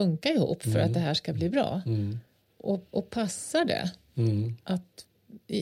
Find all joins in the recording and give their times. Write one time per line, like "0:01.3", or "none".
none